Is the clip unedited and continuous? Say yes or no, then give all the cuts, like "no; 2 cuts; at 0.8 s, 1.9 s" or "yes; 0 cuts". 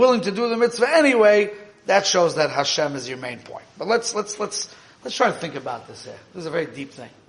yes; 0 cuts